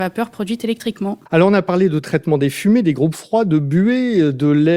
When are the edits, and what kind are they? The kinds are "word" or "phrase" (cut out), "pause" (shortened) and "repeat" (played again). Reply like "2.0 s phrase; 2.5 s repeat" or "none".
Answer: 1.3 s pause